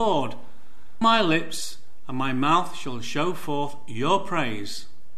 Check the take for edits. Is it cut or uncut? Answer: cut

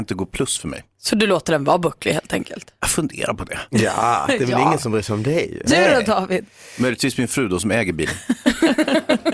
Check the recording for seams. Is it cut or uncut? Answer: cut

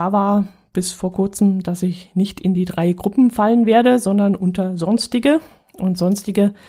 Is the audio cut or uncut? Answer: uncut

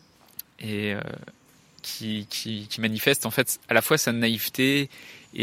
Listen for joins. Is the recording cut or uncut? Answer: uncut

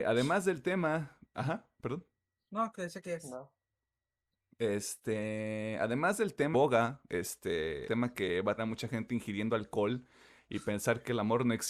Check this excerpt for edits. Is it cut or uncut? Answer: cut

